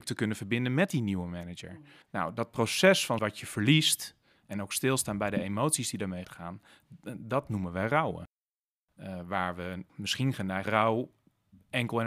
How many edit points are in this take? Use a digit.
5